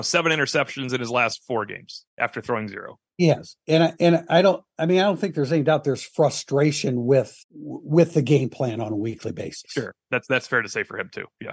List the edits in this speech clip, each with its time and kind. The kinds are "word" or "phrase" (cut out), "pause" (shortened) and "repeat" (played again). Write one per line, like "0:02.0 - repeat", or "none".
0:02.1 - pause
0:07.4 - pause